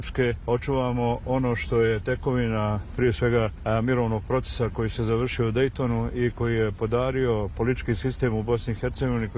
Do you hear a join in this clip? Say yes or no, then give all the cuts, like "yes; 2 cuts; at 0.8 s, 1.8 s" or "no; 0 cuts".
no; 0 cuts